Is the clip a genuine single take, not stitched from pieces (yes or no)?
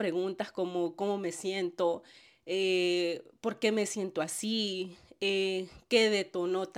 yes